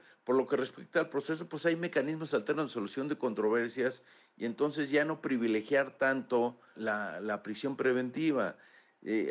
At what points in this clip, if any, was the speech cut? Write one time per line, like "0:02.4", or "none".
0:06.7